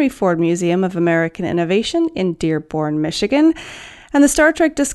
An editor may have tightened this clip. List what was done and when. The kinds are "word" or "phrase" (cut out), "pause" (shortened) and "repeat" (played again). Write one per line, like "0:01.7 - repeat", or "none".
none